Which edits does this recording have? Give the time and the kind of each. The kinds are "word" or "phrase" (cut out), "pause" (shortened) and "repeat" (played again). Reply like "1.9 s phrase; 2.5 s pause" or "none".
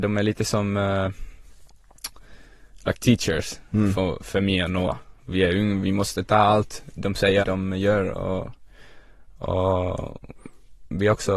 7.4 s word